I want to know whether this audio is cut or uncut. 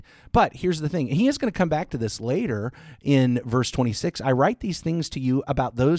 uncut